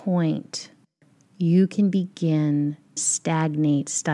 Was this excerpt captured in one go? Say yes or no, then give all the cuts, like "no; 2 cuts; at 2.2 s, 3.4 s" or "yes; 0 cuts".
no; 1 cut; at 3.0 s